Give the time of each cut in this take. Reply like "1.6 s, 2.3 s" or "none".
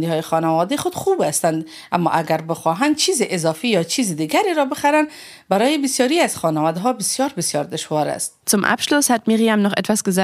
8.4 s

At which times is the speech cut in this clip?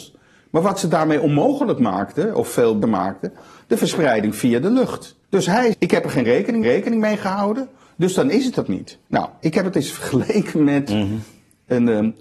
2.8 s, 5.2 s, 5.7 s, 6.6 s, 8.7 s, 9.1 s

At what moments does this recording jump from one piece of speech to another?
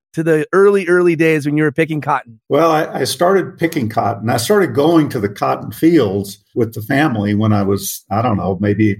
2.4 s

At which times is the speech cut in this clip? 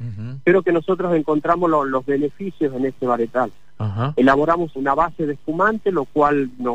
4.8 s

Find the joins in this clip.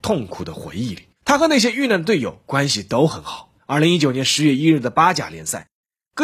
1.2 s, 3.6 s

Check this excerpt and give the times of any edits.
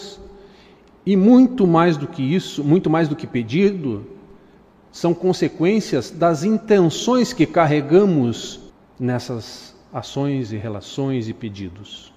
none

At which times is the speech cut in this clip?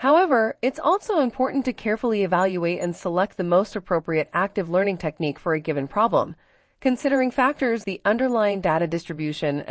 7.8 s

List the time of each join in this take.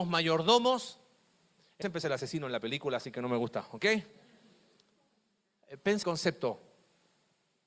1.8 s, 6.0 s

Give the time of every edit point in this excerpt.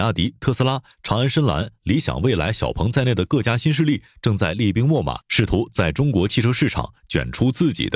5.2 s

